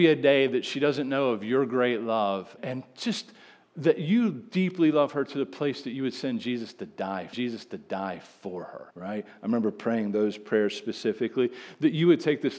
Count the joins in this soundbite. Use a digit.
3